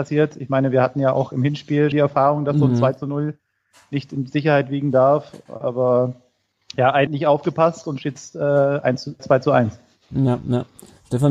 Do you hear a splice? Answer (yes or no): yes